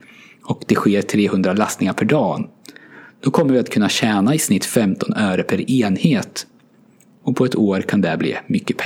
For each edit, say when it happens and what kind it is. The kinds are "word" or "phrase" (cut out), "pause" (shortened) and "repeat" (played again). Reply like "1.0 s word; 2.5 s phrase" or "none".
none

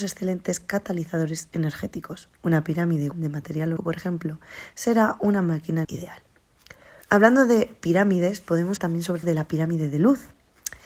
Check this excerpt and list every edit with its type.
2.3 s pause; 3.1 s word; 3.8 s word; 5.8 s word; 7.0 s pause; 8.8 s word; 9.2 s word

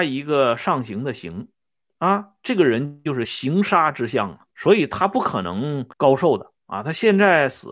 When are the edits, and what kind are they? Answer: 1.5 s pause; 4.5 s pause; 5.9 s pause; 6.6 s pause

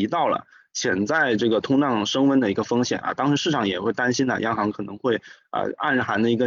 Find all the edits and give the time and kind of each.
none

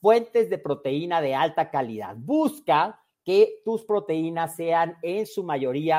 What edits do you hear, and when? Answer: none

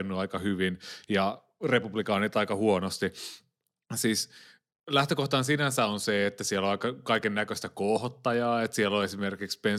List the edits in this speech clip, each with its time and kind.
none

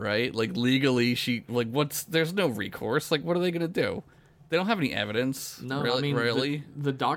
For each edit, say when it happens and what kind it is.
none

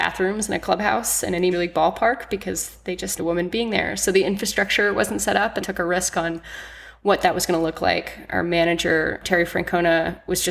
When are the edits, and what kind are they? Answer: 1.5 s word; 3.2 s phrase; 5.6 s phrase; 9.2 s word

